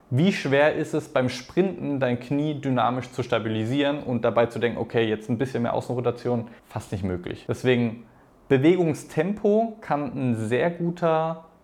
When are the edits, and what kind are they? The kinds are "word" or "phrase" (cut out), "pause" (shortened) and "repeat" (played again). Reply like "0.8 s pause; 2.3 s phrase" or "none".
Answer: 6.6 s pause